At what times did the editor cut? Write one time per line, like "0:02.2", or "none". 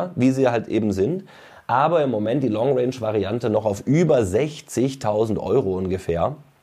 none

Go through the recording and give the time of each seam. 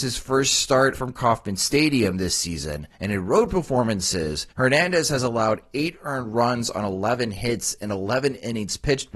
0:00.9
0:02.9
0:04.5

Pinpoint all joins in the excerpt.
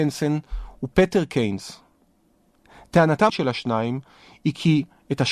0:03.3

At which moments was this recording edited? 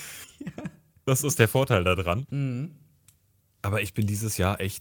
none

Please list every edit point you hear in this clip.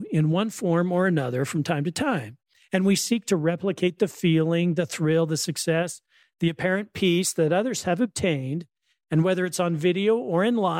none

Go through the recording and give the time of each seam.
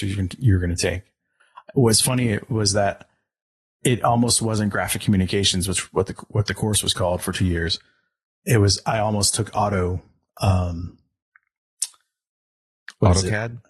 none

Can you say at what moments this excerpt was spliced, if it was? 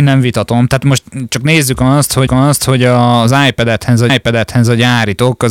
0:02.3
0:04.1

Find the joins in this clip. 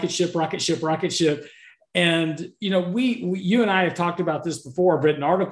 none

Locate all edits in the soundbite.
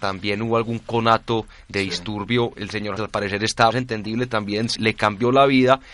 0:03.0
0:03.7
0:04.8

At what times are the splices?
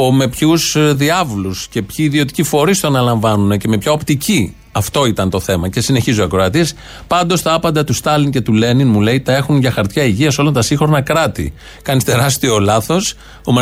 none

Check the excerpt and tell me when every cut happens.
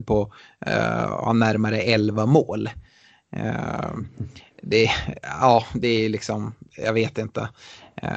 none

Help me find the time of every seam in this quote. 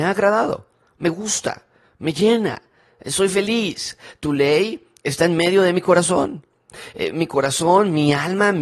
none

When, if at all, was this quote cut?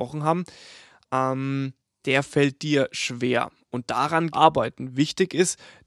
0:04.3

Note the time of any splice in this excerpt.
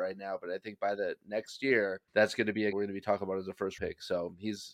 0:02.1
0:02.7
0:03.8

